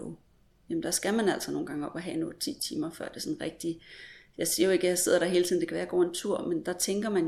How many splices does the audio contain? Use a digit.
0